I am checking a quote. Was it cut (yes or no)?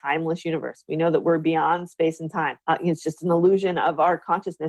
yes